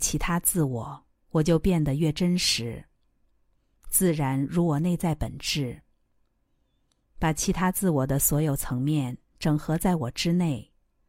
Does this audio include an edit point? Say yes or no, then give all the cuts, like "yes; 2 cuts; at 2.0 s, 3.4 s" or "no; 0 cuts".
no; 0 cuts